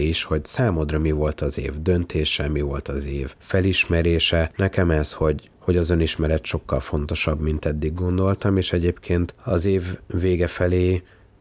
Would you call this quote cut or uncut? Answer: uncut